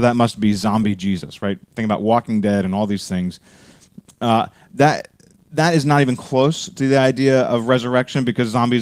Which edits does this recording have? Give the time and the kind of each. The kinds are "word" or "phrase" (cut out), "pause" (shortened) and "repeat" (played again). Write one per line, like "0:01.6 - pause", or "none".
none